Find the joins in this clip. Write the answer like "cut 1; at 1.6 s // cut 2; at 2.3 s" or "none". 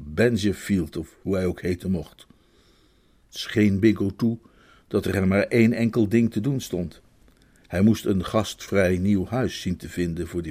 none